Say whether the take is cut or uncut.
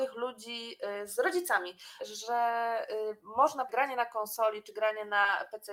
cut